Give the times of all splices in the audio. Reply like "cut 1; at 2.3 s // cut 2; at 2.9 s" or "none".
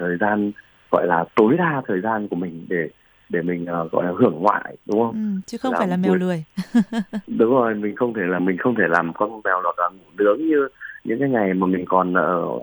cut 1; at 8.4 s // cut 2; at 9.6 s